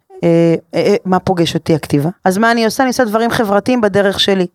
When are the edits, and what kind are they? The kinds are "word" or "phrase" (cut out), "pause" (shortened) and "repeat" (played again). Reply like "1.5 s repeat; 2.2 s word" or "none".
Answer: 2.2 s pause